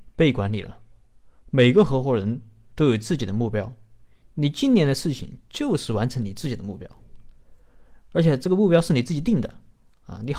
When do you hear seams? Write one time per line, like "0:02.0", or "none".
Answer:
none